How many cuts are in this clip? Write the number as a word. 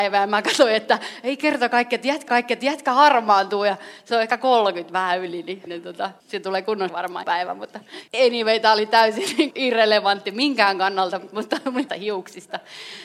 eight